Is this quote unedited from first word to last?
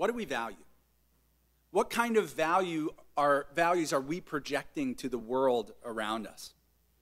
yes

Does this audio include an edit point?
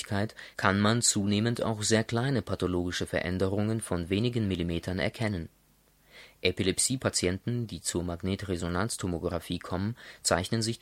no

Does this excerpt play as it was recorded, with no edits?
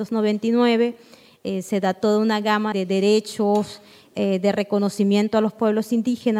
no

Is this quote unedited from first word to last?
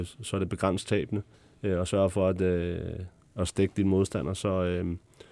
no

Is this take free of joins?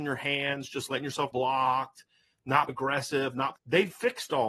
no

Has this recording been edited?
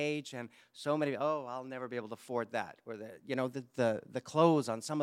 no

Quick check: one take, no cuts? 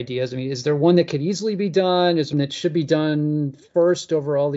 no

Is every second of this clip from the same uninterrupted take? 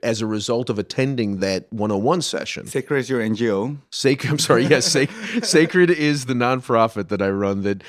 yes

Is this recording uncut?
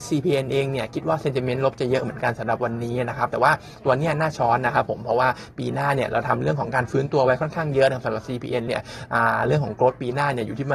no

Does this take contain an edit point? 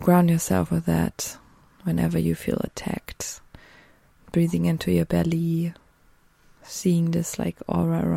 no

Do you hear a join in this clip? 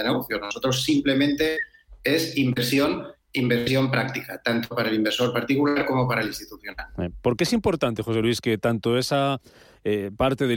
no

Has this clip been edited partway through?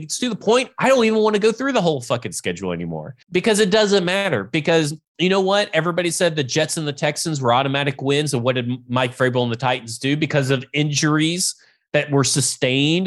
yes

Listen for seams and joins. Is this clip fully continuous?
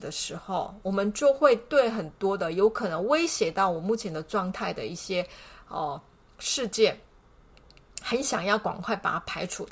yes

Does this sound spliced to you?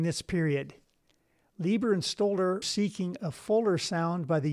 yes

